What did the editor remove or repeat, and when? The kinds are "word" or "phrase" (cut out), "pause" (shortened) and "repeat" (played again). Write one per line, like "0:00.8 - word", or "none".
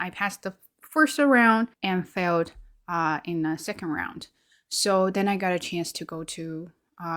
0:01.7 - pause